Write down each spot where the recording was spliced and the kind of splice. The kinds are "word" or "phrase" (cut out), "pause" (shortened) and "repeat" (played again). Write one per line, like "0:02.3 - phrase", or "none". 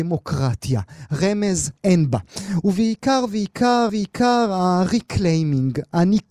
0:01.8 - pause
0:03.9 - repeat